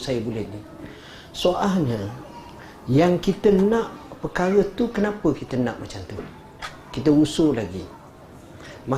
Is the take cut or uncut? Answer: uncut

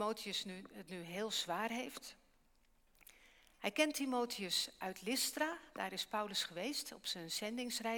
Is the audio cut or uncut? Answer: uncut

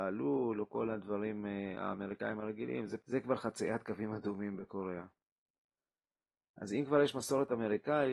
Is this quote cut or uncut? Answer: uncut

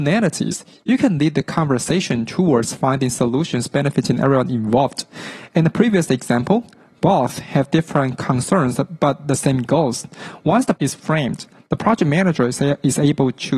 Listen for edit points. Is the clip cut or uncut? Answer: cut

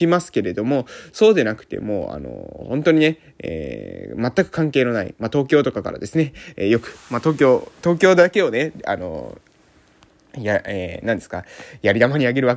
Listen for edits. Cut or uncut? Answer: uncut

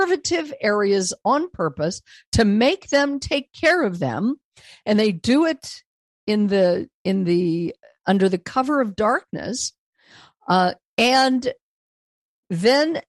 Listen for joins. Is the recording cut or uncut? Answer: uncut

